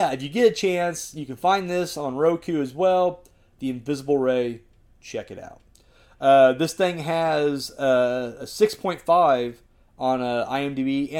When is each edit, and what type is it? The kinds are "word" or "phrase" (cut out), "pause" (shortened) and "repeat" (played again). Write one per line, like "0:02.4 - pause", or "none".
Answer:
none